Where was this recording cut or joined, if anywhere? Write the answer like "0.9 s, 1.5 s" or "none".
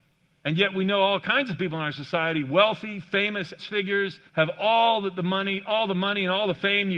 3.6 s, 4.3 s